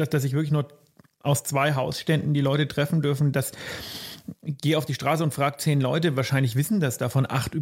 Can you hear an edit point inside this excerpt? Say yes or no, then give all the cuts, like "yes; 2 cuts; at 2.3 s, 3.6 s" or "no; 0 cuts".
no; 0 cuts